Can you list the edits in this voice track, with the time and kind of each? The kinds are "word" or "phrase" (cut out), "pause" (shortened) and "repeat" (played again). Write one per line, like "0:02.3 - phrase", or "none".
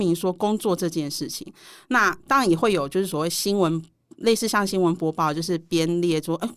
none